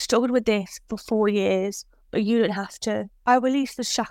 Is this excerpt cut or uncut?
uncut